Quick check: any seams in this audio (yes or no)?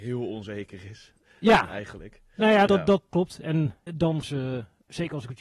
yes